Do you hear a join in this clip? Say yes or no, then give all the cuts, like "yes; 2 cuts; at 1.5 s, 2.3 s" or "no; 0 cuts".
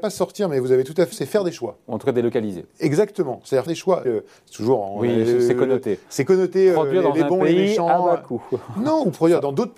yes; 3 cuts; at 1.1 s, 3.7 s, 4.0 s